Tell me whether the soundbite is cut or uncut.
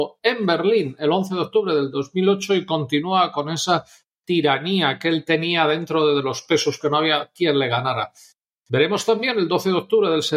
cut